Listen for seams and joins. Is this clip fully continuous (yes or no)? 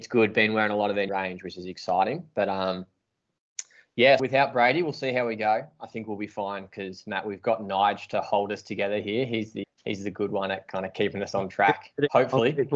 no